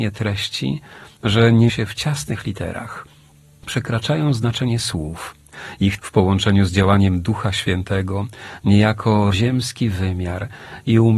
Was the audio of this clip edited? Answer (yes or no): yes